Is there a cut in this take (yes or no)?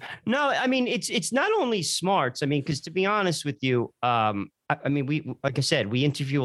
no